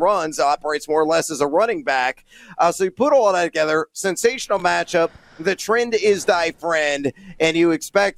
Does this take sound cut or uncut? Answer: uncut